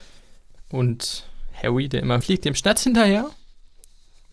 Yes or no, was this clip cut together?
yes